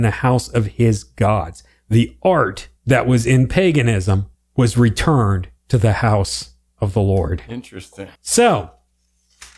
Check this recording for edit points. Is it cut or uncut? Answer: cut